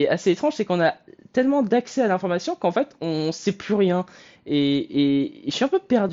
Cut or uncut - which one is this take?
uncut